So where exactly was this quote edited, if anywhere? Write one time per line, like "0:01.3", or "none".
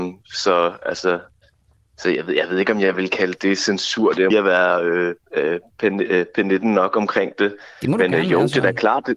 0:04.3